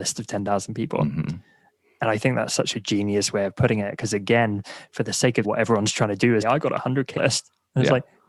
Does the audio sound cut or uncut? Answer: cut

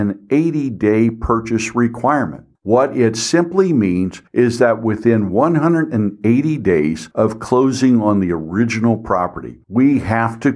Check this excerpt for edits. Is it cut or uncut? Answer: cut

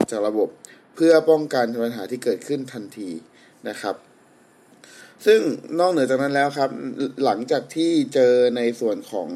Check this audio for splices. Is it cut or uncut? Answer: uncut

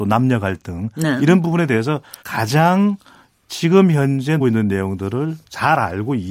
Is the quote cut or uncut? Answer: cut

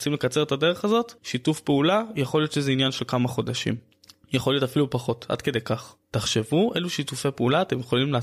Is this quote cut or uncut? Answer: cut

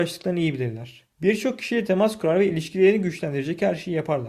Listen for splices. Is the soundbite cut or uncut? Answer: cut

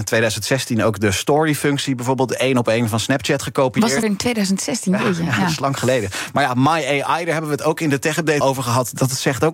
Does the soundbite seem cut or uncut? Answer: cut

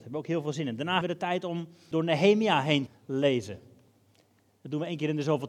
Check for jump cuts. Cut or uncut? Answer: cut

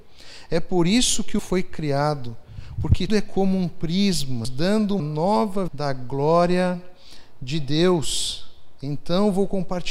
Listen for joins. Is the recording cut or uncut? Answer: cut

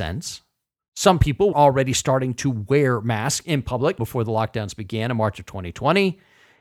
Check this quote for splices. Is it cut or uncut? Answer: cut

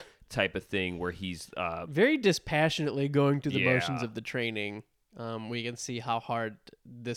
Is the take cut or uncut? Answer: uncut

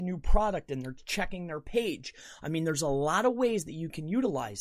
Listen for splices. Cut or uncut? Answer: uncut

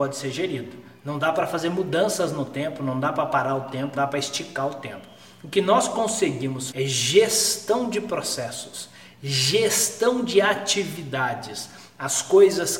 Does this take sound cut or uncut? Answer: cut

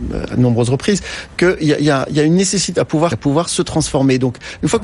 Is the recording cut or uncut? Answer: cut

